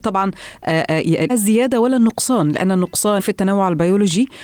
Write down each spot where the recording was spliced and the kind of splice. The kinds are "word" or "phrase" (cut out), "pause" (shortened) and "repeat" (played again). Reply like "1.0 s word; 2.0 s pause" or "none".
1.3 s word; 3.2 s phrase